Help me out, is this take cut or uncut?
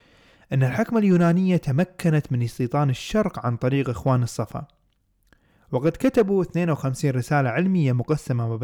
uncut